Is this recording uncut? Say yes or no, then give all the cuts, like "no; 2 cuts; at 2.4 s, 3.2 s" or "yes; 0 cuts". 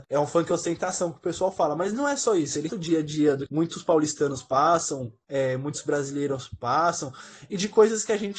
no; 2 cuts; at 2.7 s, 3.5 s